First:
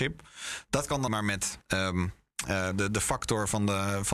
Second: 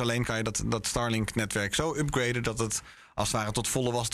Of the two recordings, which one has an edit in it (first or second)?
first